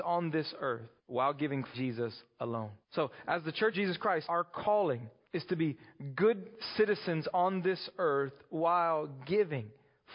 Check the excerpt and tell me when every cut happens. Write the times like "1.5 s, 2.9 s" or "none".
1.0 s, 1.7 s, 2.8 s, 3.7 s, 4.2 s, 5.2 s